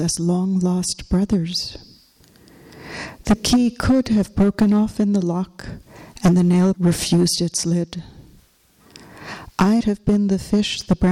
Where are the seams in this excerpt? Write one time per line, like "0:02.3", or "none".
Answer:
0:06.7
0:09.8